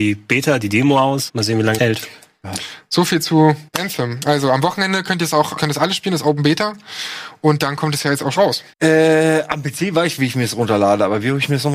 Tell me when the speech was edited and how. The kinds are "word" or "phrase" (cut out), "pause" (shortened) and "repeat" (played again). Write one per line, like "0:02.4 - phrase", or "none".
0:01.3 - word
0:01.8 - word
0:03.7 - pause
0:05.6 - word
0:08.4 - word
0:08.7 - pause